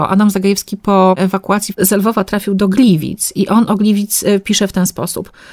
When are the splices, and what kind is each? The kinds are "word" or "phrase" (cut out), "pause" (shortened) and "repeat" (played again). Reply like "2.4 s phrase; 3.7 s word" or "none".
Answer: none